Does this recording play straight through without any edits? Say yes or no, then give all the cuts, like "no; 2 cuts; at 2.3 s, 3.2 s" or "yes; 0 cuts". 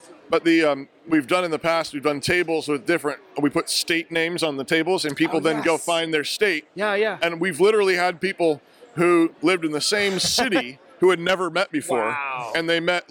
yes; 0 cuts